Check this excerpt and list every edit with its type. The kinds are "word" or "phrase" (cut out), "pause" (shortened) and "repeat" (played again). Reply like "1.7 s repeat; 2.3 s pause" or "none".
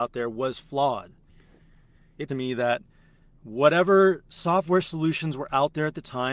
2.3 s phrase; 4.3 s pause